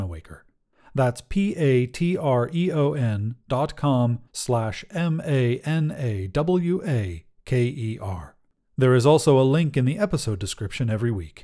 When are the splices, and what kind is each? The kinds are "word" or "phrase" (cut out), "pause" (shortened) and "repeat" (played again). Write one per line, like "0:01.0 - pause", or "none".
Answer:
0:04.3 - pause
0:08.5 - pause